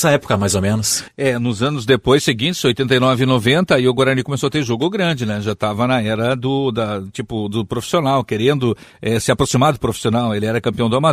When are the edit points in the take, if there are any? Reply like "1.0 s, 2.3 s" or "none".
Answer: none